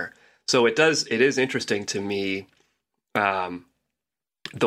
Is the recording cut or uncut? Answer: uncut